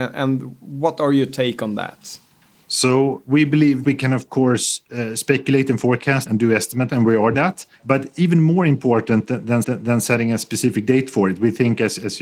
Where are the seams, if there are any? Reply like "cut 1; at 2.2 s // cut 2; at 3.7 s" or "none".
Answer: cut 1; at 3.8 s // cut 2; at 6.3 s // cut 3; at 6.9 s // cut 4; at 7.3 s // cut 5; at 7.7 s // cut 6; at 9.6 s